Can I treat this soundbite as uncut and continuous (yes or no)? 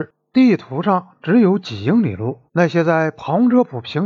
no